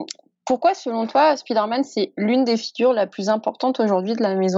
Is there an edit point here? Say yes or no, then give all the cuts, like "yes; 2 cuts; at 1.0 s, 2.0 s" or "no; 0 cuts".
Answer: no; 0 cuts